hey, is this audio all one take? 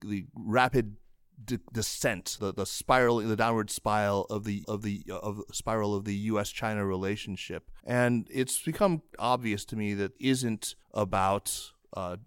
no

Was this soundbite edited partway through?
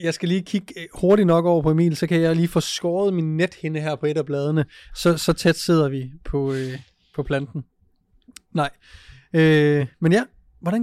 no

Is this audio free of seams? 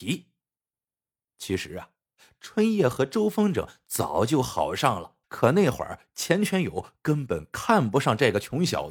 no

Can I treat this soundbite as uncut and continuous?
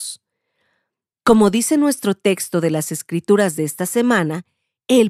yes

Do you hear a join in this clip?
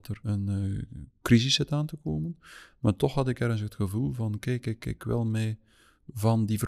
no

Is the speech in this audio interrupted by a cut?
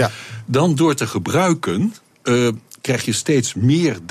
yes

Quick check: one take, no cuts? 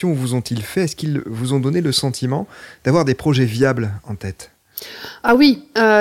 yes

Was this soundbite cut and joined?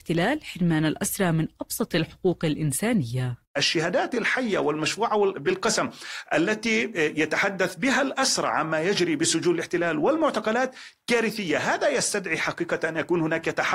yes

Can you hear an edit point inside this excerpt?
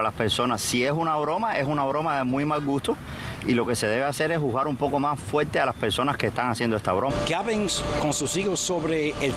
no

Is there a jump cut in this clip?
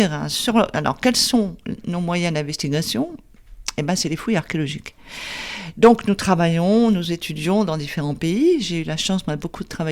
no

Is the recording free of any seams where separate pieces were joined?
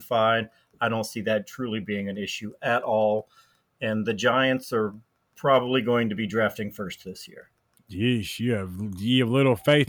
yes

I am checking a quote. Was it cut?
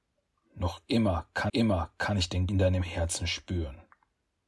yes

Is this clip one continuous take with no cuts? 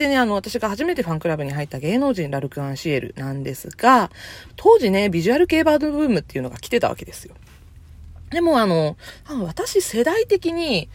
no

